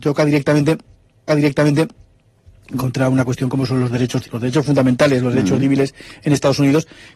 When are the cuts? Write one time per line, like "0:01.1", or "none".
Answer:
0:01.3
0:04.2